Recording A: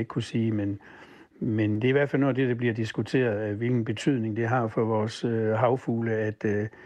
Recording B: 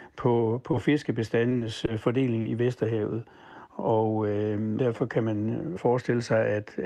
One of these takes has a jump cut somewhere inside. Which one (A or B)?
B